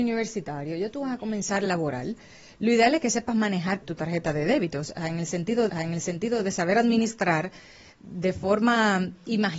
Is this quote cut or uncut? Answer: cut